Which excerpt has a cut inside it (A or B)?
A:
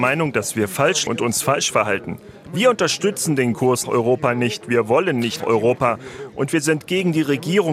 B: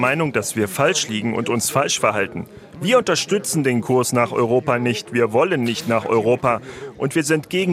A